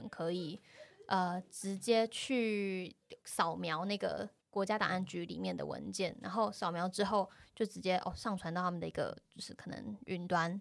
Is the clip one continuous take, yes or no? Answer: no